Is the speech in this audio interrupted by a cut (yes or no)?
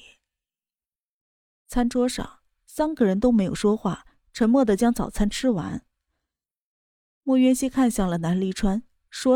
no